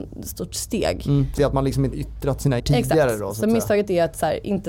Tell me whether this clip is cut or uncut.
cut